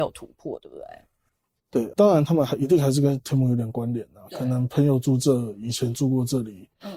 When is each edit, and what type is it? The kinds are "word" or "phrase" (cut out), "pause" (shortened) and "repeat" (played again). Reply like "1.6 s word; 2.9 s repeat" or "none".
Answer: 1.9 s word

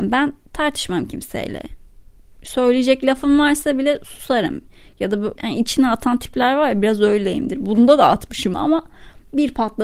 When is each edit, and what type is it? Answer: 5.4 s word; 8.5 s word

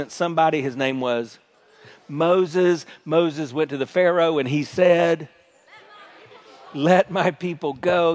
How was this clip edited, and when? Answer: none

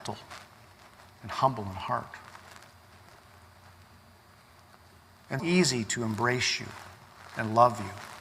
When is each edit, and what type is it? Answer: 5.4 s word

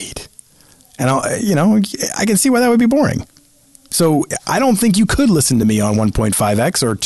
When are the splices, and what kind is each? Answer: none

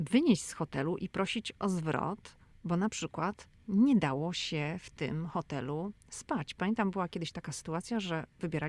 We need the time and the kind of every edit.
none

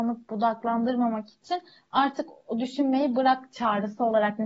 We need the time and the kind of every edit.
none

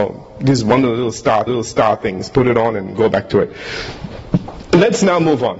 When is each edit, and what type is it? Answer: 1.5 s repeat

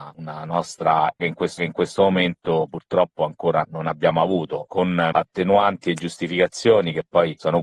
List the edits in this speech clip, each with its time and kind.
1.2 s word; 1.6 s repeat; 3.6 s word; 5.1 s word

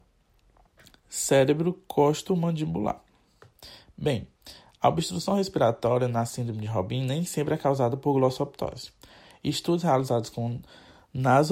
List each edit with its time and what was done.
none

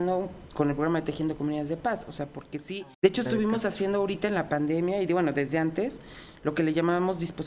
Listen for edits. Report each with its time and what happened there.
2.9 s pause

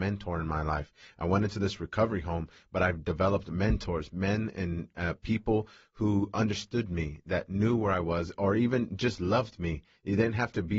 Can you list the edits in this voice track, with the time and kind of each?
none

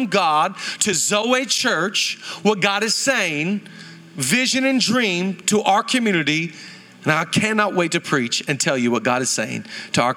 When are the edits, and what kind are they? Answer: none

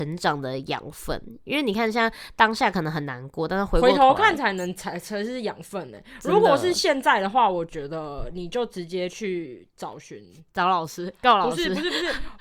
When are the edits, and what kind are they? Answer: none

